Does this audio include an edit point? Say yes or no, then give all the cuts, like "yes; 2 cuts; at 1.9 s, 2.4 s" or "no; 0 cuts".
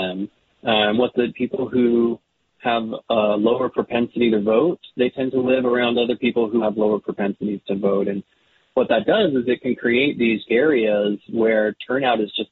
yes; 4 cuts; at 1.1 s, 4.9 s, 6.6 s, 10.5 s